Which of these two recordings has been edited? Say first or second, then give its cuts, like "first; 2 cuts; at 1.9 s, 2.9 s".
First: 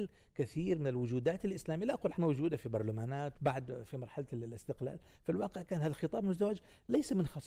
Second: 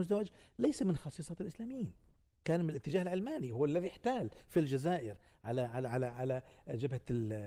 first; 2 cuts; at 2.1 s, 3.3 s